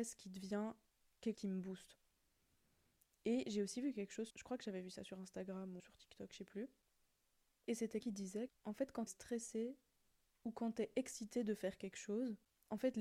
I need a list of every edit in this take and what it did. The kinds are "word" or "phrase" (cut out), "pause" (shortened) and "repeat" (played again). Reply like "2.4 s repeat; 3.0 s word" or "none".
1.3 s word; 4.3 s word; 5.8 s word; 8.0 s word; 8.5 s word; 9.1 s word